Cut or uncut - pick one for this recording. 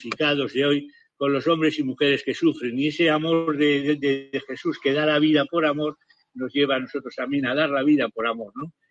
uncut